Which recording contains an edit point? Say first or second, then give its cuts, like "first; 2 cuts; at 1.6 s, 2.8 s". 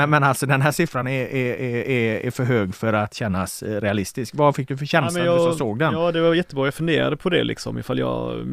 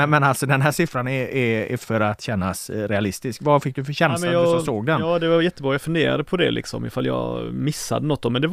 second; 2 cuts; at 1.3 s, 1.8 s